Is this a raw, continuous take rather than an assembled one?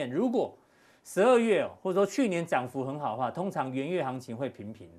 yes; 0 cuts

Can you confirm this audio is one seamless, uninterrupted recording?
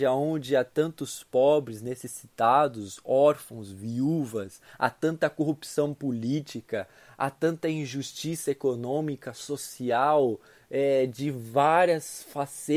yes; 0 cuts

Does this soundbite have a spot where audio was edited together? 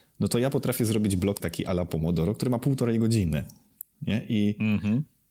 yes; 1 cut; at 1.4 s

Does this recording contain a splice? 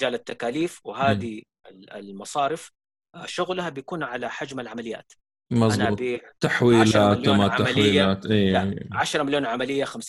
no; 0 cuts

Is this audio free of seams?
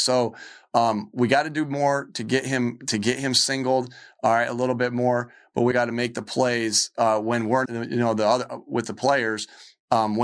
no; 2 cuts; at 5.7 s, 7.6 s

